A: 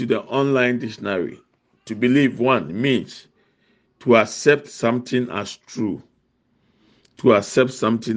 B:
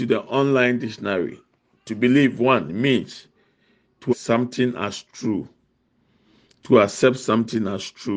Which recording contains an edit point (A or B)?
B